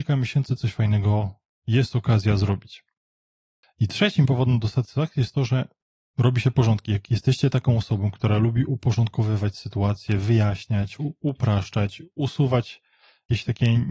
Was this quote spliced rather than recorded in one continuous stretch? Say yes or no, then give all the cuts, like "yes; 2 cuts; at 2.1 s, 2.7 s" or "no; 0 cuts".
no; 0 cuts